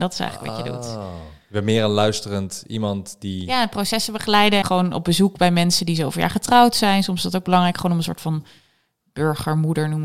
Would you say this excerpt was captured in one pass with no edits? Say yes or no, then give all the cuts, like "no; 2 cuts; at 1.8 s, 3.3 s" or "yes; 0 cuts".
no; 1 cut; at 4.6 s